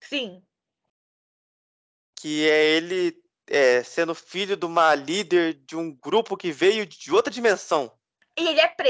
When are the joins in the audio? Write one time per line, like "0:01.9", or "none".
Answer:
none